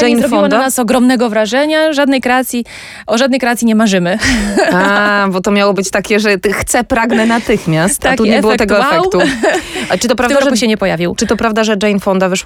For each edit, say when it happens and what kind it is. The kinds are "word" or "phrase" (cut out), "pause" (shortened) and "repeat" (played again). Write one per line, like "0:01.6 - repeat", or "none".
none